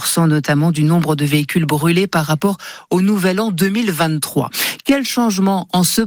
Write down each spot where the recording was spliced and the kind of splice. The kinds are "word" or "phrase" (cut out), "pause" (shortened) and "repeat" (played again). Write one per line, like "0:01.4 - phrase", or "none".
none